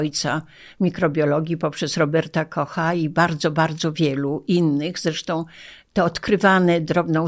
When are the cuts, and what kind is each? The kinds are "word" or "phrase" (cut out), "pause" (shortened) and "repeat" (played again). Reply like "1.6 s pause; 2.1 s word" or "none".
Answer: none

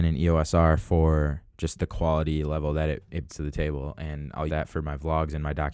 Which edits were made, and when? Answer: 1.5 s pause; 3.3 s word; 4.5 s word

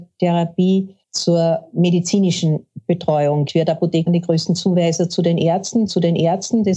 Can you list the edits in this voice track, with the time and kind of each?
1.0 s pause; 3.5 s word; 4.1 s word; 5.9 s repeat

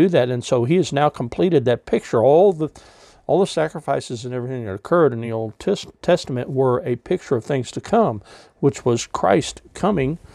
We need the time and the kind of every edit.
none

